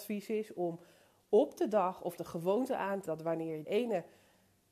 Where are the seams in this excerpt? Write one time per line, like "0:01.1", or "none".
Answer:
0:02.2
0:03.1
0:03.6

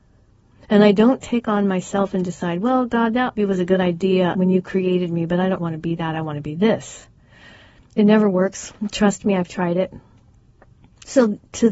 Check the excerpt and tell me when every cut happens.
0:03.4
0:04.3
0:05.6

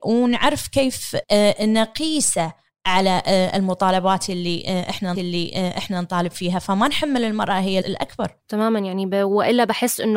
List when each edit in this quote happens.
0:01.2
0:05.1
0:07.8
0:08.4

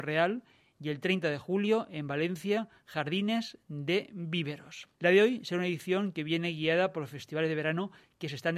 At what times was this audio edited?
0:04.9

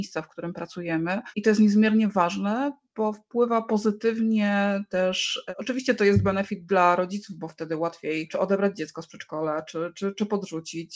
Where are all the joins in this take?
none

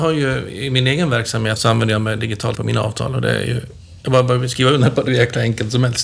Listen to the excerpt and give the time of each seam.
0:01.6
0:02.5
0:05.1

